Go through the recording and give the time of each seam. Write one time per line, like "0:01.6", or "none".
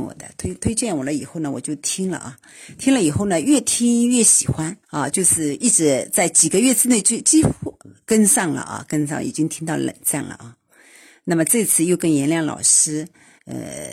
0:04.8